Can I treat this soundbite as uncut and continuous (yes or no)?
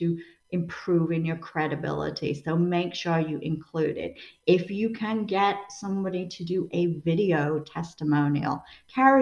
yes